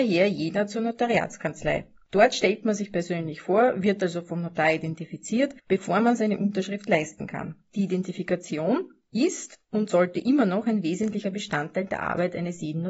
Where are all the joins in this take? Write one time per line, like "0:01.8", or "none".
0:05.6